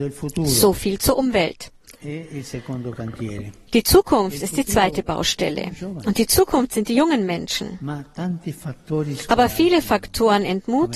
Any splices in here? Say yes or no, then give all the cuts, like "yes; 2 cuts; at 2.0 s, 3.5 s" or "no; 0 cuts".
no; 0 cuts